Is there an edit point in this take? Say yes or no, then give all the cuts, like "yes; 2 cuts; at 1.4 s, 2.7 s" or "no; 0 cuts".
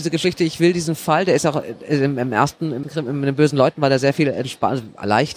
yes; 1 cut; at 2.8 s